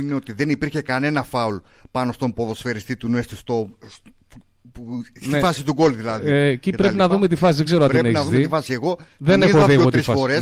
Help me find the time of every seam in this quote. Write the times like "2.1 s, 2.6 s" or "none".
none

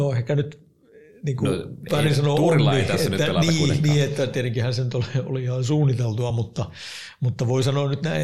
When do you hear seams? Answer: none

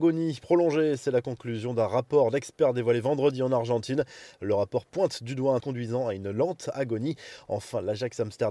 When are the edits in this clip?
5.6 s

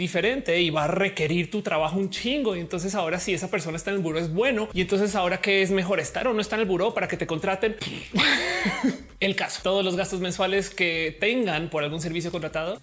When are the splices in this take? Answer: none

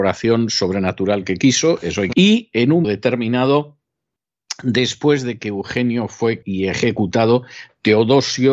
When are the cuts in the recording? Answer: 2.1 s, 2.8 s, 6.4 s

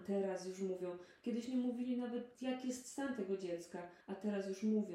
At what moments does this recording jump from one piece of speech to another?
4.0 s

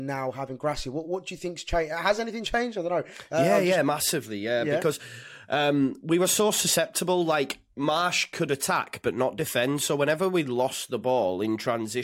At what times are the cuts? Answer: none

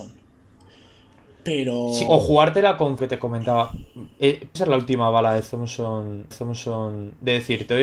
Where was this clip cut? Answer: 2.1 s, 3.0 s, 4.6 s, 6.3 s

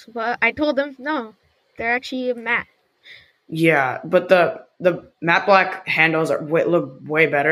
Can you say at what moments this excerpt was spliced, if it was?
none

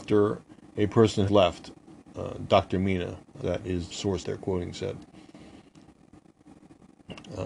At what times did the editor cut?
1.3 s, 3.4 s, 3.9 s, 4.2 s

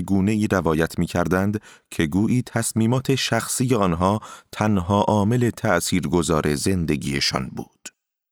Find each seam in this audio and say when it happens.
none

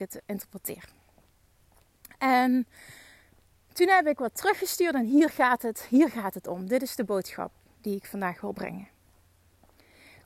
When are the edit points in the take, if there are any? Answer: none

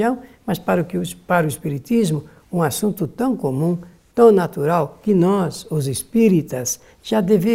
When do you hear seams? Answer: none

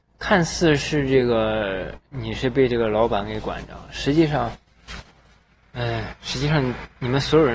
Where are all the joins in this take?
none

